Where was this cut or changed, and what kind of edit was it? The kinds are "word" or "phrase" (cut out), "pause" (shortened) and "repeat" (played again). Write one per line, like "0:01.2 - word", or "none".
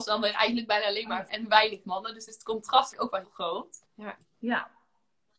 0:01.3 - word
0:01.8 - word
0:02.3 - word
0:02.9 - word
0:03.2 - word
0:03.8 - pause